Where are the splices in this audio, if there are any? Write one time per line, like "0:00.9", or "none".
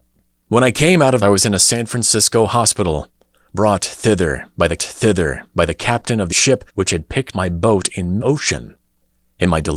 0:01.2
0:04.8
0:06.3
0:06.7
0:07.3
0:08.2